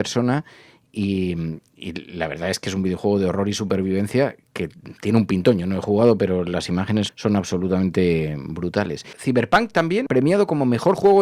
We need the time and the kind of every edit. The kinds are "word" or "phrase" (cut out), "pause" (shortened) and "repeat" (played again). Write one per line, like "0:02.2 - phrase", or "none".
0:07.1 - word

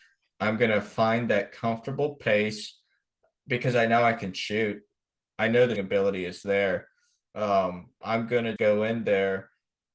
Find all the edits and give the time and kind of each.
0:05.8 - word
0:08.0 - word
0:08.6 - word

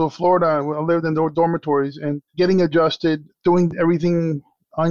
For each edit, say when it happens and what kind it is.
0:02.3 - pause
0:03.3 - pause

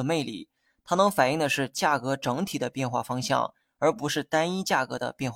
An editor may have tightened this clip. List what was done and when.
none

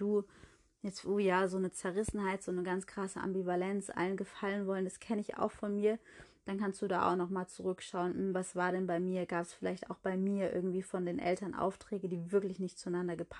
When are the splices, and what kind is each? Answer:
0:01.0 - phrase

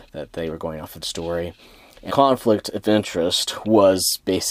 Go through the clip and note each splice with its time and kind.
0:01.0 - word
0:02.1 - phrase

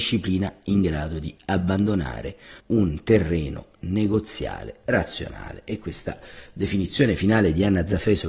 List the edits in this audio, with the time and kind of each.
0:02.6 - pause

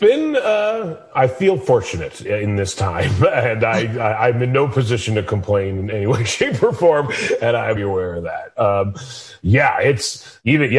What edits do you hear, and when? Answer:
0:02.2 - word
0:07.8 - word

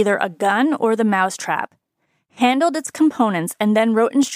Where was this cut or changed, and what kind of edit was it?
none

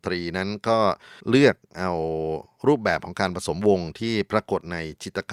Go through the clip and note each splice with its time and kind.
0:01.2 - pause

